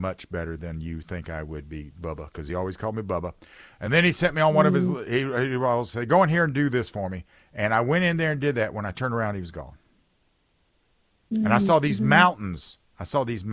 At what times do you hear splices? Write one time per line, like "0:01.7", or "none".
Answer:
none